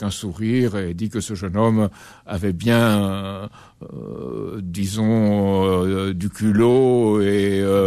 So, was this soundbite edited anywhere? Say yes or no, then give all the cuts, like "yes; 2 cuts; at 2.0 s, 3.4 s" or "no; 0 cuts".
no; 0 cuts